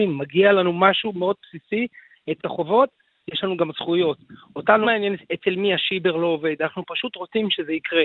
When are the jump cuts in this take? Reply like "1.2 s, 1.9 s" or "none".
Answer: 2.4 s, 4.8 s, 5.2 s